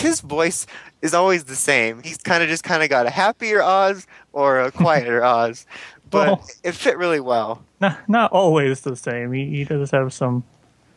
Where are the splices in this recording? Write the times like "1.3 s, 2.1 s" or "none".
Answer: none